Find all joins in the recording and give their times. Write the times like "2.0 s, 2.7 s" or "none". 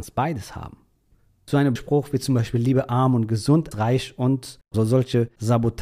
1.8 s, 3.7 s, 4.6 s